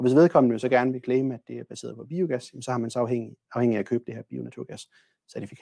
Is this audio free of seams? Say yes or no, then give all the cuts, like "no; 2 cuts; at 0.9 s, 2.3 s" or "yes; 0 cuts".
yes; 0 cuts